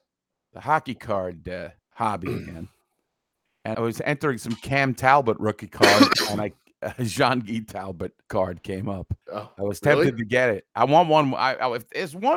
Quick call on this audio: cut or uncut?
cut